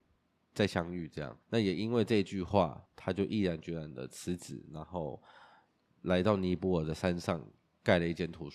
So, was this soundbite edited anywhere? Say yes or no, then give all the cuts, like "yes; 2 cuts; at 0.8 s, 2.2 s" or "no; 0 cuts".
yes; 2 cuts; at 1.4 s, 2.9 s